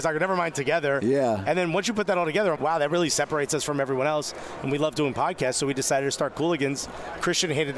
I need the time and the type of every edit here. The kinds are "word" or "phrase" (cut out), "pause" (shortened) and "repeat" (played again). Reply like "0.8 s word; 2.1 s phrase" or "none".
2.6 s word